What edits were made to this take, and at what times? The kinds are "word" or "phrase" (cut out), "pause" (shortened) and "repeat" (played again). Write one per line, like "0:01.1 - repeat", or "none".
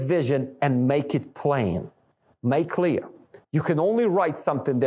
0:02.7 - word
0:03.4 - pause

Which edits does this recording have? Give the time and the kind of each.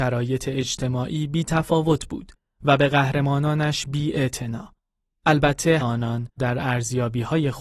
0:05.8 - phrase
0:06.4 - word

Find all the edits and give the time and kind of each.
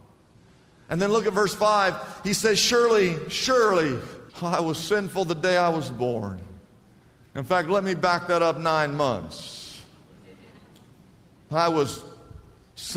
0:04.3 - pause

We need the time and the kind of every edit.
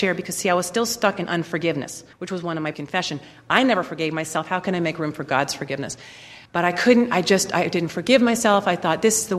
0:02.1 - pause
0:02.7 - phrase
0:06.5 - pause

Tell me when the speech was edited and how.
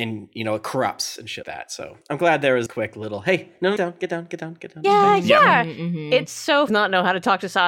0:01.4 - word
0:02.7 - word
0:03.8 - phrase
0:06.7 - phrase

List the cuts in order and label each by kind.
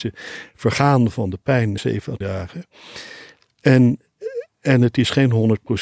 0:01.8 - word
0:02.2 - word

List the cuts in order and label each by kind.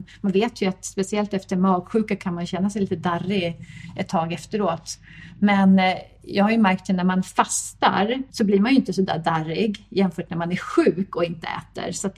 0:08.3 - pause

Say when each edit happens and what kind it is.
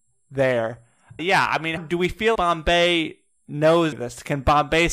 0:01.2 - word
0:01.8 - word
0:02.3 - word
0:03.9 - word

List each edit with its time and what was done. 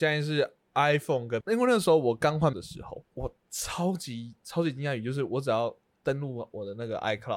0:01.4 - word
0:02.5 - word
0:03.0 - word

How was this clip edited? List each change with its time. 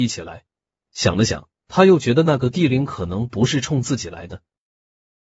0:01.6 - pause

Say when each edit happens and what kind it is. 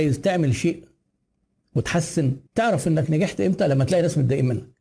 0:02.5 - pause

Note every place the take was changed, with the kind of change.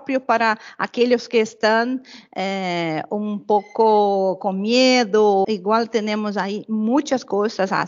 0:05.4 - phrase

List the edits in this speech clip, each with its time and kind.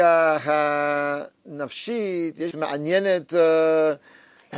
0:02.5 - word

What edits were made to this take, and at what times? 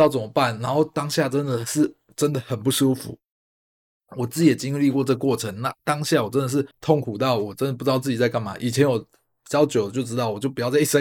0:06.7 - pause

